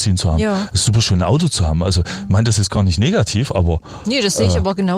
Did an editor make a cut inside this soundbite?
no; 0 cuts

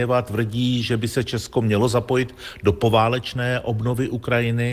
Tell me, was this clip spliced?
no; 0 cuts

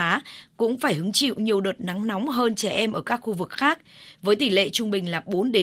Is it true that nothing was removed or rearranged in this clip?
yes; 0 cuts

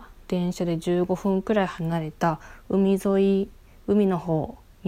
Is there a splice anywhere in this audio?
no; 0 cuts

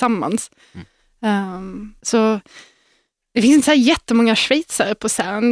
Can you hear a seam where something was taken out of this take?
yes; 1 cut; at 2.0 s

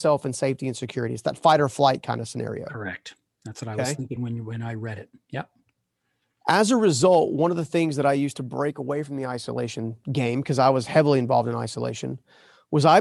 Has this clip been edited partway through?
no; 0 cuts

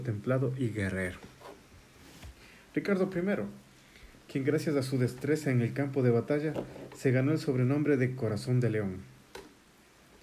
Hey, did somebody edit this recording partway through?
no; 0 cuts

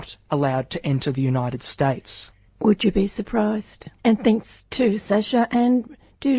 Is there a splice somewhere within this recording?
yes; 2 cuts; at 2.5 s, 4.0 s

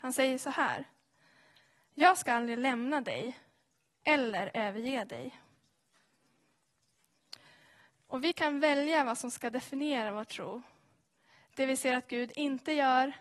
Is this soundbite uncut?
yes; 0 cuts

